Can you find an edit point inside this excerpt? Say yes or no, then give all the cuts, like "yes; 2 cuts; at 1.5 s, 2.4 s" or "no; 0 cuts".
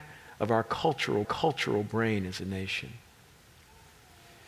yes; 1 cut; at 1.2 s